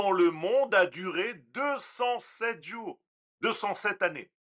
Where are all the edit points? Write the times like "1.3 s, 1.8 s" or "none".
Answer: none